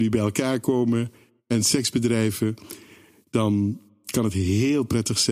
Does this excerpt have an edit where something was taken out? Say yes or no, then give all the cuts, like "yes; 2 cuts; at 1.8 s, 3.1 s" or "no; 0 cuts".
no; 0 cuts